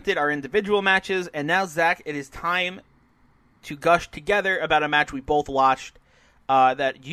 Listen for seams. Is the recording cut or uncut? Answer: uncut